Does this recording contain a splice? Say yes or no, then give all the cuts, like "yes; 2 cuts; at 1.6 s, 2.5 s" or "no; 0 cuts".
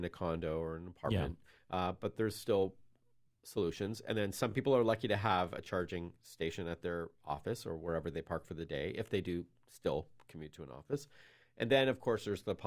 no; 0 cuts